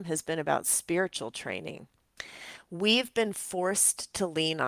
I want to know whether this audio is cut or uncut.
uncut